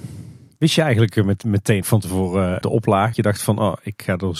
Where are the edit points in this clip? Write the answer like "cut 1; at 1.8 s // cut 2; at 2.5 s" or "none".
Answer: cut 1; at 1.8 s // cut 2; at 2.6 s // cut 3; at 3.1 s